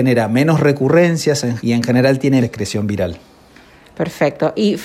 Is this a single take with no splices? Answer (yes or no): no